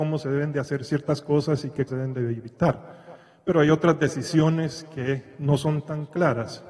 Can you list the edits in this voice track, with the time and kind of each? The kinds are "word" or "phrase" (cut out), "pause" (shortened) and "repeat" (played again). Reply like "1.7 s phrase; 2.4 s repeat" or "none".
1.9 s word